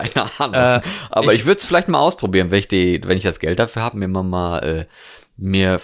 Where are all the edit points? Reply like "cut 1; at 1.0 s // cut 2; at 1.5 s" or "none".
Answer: none